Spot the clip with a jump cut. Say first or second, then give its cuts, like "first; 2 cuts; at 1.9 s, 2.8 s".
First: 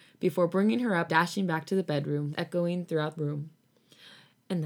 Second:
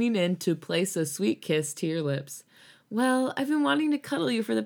first; 3 cuts; at 1.1 s, 2.3 s, 3.2 s